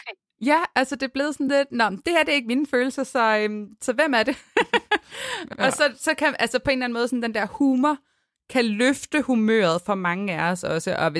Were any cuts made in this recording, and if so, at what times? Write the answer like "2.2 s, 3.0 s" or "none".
none